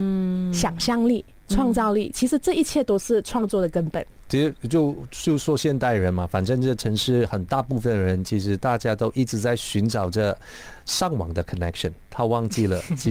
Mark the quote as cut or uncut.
uncut